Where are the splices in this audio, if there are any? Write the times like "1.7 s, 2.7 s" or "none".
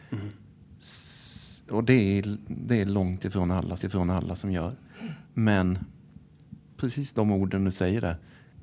3.8 s, 5.2 s